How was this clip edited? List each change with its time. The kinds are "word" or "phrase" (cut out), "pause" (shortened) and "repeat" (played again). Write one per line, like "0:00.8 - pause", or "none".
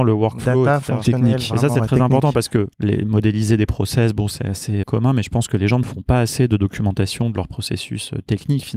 0:02.7 - pause
0:04.8 - word